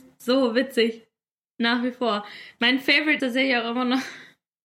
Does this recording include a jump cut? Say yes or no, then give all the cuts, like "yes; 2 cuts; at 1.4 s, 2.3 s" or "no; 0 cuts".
yes; 1 cut; at 3.2 s